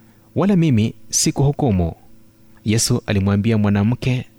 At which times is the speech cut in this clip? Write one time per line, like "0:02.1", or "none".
none